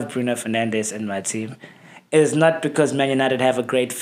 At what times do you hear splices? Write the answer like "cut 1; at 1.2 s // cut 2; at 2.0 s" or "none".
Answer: none